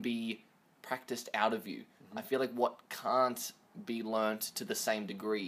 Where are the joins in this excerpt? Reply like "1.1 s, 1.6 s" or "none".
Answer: none